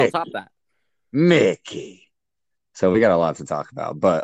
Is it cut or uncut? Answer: uncut